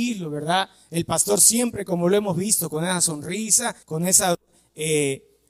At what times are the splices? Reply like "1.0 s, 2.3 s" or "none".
3.8 s

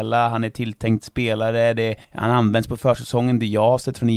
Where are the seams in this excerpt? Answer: 2.0 s

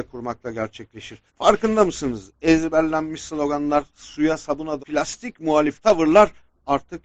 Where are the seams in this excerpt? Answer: 1.3 s, 4.8 s

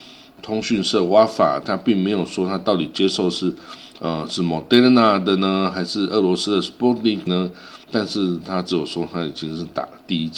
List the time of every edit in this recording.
7.3 s, 7.8 s

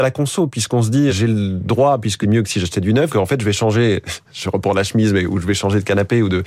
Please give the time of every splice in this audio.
1.1 s, 2.2 s, 3.1 s

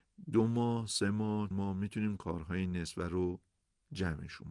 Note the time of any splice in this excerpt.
1.5 s

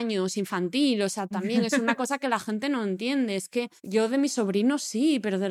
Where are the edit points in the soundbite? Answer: 3.8 s

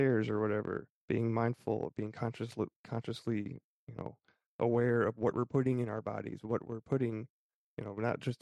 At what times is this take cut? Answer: 1.0 s

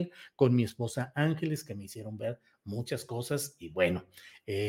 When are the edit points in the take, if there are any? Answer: none

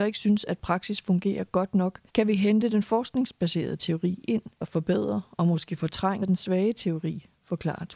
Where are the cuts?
2.1 s, 4.6 s, 6.2 s

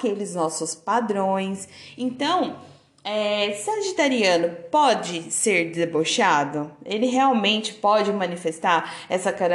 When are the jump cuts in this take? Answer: none

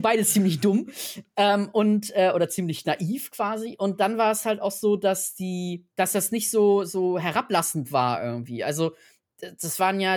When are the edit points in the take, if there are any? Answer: 5.9 s

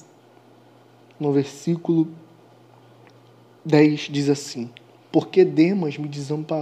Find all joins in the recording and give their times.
none

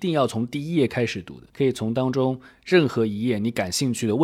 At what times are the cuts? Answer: 1.5 s

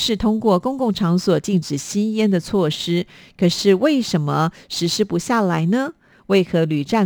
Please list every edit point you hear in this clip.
none

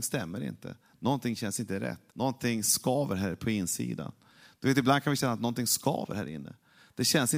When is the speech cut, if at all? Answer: 2.1 s

